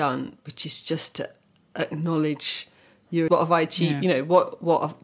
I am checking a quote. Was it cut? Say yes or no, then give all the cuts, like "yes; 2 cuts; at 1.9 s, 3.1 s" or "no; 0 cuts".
yes; 1 cut; at 3.3 s